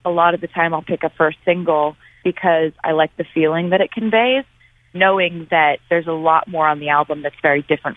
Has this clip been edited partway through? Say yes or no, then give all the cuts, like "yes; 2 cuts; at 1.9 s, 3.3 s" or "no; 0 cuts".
yes; 1 cut; at 5.8 s